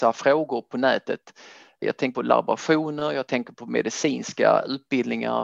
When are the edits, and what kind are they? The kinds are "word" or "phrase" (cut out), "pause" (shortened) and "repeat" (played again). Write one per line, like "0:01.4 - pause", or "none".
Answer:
0:02.1 - word